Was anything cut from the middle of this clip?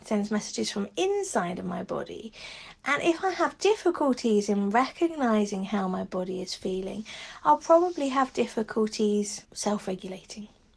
yes; 1 cut; at 9.4 s

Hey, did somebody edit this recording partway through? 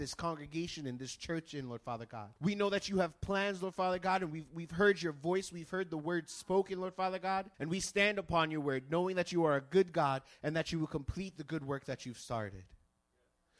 yes; 2 cuts; at 2.4 s, 7.5 s

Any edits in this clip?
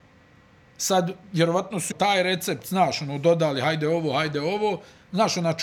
yes; 1 cut; at 1.9 s

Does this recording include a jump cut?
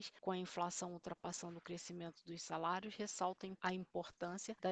no; 0 cuts

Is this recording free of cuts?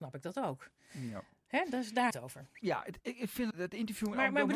no; 3 cuts; at 2.1 s, 2.5 s, 3.5 s

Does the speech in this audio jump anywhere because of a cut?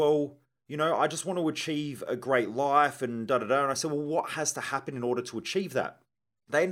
no; 0 cuts

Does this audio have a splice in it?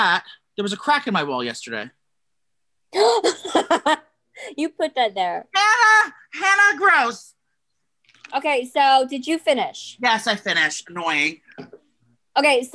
no; 0 cuts

